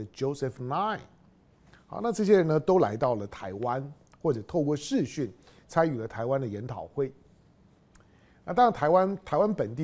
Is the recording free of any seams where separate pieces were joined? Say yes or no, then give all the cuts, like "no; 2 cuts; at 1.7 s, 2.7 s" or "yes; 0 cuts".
yes; 0 cuts